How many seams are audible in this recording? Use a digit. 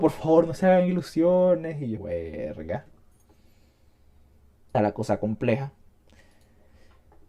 2